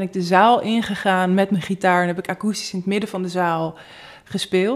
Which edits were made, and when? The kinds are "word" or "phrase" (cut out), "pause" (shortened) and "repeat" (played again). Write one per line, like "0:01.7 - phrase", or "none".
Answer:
none